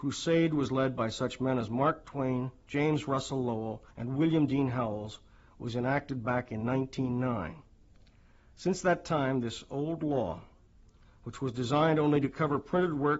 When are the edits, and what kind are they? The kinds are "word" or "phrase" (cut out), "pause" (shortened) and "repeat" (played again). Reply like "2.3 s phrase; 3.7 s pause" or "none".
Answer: 3.9 s pause